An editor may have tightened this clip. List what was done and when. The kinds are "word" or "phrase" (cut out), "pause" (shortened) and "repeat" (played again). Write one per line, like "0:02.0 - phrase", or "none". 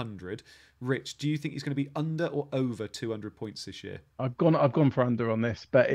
0:04.1 - pause